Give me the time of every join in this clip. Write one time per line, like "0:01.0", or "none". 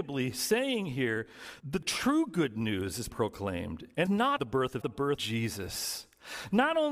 0:01.6
0:03.1
0:04.0
0:04.4
0:04.8
0:05.2